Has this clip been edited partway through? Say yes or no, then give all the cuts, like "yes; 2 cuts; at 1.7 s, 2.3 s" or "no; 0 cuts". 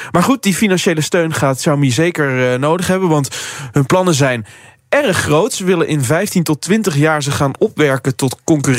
no; 0 cuts